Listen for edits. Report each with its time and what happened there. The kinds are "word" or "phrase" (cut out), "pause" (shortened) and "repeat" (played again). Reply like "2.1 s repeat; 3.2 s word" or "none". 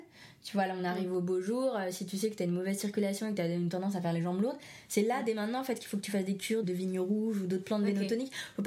6.6 s word